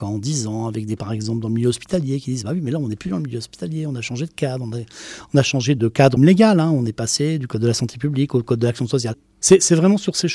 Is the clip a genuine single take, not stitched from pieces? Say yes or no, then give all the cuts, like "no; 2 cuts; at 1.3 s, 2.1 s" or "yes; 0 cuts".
no; 3 cuts; at 1.0 s, 5.8 s, 6.2 s